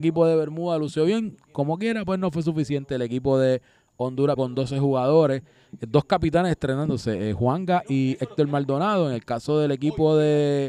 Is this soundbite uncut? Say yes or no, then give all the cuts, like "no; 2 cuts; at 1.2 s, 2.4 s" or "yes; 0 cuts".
no; 1 cut; at 4.4 s